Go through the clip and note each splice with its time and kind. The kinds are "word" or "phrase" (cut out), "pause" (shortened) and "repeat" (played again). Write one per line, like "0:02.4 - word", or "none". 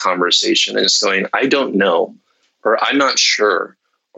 none